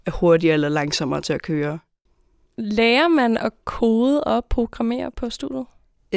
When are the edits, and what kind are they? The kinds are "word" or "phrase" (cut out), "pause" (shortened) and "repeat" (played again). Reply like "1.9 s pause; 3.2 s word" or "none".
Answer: none